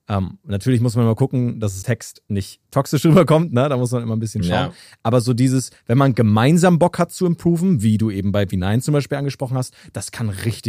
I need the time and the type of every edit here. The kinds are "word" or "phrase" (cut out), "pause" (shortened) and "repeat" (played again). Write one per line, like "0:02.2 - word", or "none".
0:01.8 - word